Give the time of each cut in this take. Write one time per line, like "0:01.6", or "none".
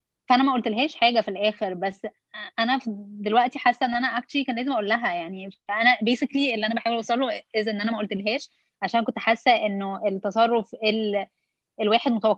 none